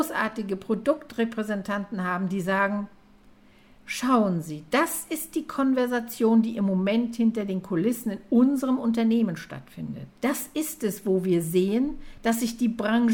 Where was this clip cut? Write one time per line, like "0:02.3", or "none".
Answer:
0:10.1